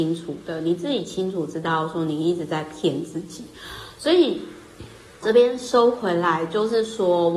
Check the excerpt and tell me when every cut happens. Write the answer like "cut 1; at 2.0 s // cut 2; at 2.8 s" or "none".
cut 1; at 5.2 s